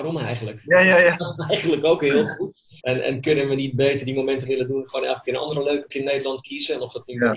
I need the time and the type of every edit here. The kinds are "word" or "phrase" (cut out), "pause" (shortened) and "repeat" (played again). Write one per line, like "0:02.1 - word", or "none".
0:02.8 - pause
0:04.5 - phrase
0:05.9 - word